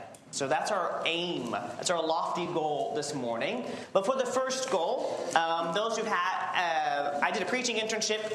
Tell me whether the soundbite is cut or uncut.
uncut